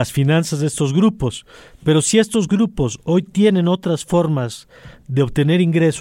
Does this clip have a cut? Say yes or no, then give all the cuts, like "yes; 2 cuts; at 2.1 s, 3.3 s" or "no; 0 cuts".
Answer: no; 0 cuts